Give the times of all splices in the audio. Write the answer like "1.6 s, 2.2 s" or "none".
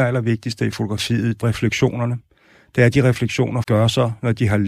1.4 s, 3.6 s